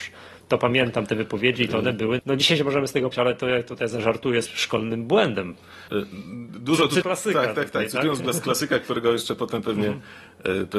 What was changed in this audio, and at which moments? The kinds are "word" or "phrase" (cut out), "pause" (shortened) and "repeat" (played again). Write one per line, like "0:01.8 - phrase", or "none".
0:02.2 - word
0:03.1 - word
0:04.4 - word
0:05.9 - pause
0:07.0 - word